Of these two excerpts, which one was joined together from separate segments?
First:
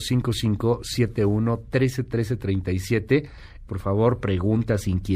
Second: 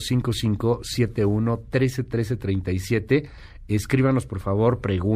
first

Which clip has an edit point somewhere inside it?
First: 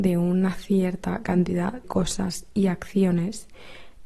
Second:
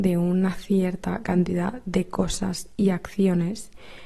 first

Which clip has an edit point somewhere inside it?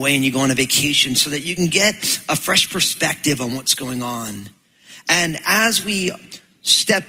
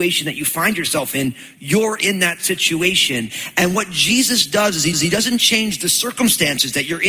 second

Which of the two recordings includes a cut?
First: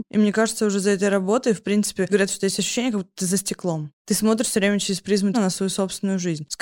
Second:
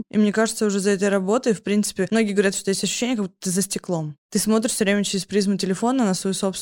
first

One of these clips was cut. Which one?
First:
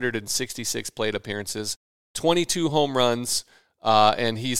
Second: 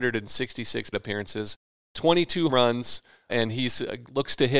second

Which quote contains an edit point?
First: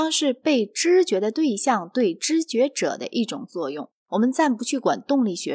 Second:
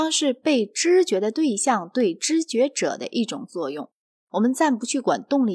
first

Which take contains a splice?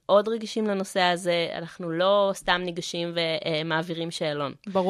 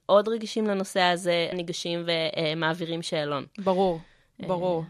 second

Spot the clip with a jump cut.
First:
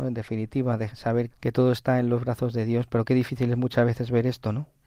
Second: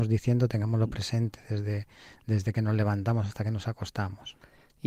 first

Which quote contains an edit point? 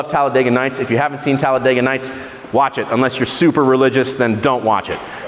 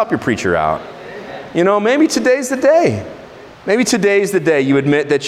second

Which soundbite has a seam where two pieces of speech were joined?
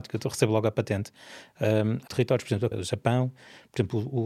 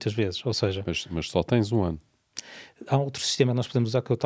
first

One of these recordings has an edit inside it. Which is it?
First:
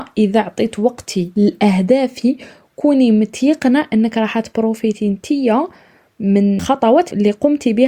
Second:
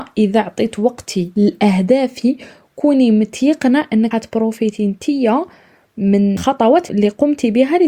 second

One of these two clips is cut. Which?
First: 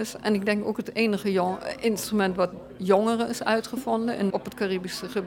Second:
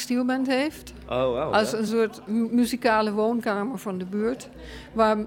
first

